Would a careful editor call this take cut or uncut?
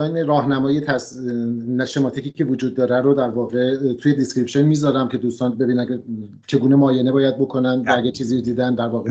uncut